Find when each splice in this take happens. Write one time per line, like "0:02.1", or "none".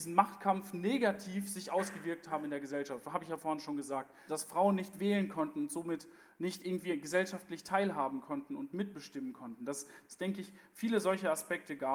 0:04.3